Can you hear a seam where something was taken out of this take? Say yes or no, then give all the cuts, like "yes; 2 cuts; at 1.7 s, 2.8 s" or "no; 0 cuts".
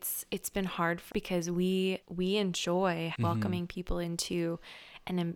yes; 3 cuts; at 1.1 s, 2.0 s, 3.1 s